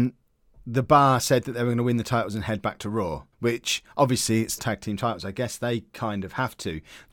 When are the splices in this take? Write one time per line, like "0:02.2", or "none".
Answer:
0:03.3
0:04.6